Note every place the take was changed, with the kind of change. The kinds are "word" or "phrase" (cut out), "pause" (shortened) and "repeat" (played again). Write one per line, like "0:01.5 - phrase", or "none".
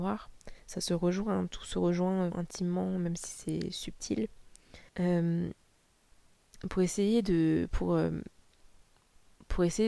0:02.3 - word
0:04.9 - pause